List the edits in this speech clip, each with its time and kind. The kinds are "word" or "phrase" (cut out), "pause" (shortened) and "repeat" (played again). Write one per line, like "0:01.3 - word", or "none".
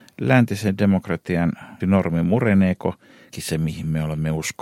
0:01.8 - word
0:03.3 - word